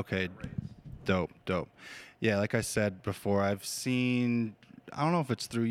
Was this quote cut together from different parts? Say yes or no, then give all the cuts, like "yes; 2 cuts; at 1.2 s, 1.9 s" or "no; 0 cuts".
no; 0 cuts